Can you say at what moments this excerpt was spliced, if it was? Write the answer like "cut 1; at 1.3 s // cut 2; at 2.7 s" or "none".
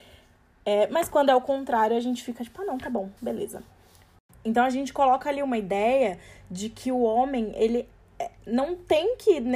cut 1; at 3.2 s